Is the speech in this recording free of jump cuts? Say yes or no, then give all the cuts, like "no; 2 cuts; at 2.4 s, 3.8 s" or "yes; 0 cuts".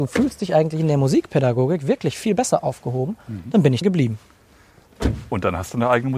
no; 1 cut; at 3.8 s